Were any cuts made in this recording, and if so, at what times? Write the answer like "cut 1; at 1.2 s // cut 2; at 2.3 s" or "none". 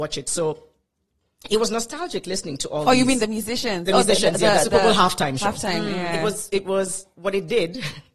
none